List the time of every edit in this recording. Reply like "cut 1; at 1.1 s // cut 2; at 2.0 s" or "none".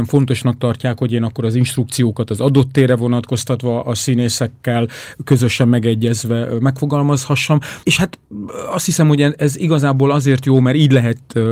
cut 1; at 7.8 s